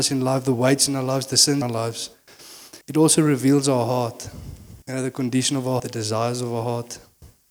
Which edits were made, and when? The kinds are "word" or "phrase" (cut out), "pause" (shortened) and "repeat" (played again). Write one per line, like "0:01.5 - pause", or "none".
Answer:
0:01.6 - word
0:02.8 - pause
0:04.8 - pause
0:05.8 - word